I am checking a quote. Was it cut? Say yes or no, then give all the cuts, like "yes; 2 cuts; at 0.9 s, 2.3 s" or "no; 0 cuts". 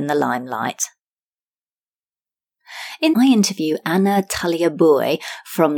yes; 1 cut; at 3.1 s